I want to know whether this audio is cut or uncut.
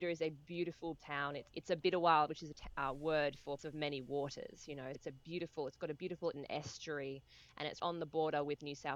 cut